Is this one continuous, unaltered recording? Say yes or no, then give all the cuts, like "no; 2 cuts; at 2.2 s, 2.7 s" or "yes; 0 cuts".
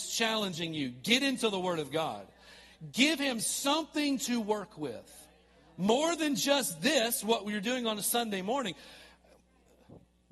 yes; 0 cuts